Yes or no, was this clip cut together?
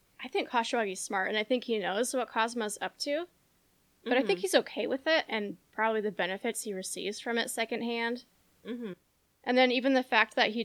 no